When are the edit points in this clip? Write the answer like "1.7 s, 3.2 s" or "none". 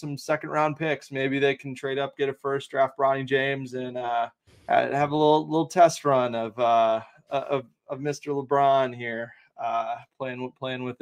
4.5 s